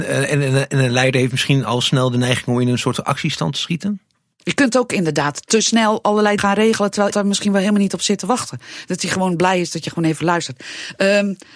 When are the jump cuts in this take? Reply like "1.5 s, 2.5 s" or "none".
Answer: 6.4 s, 7.1 s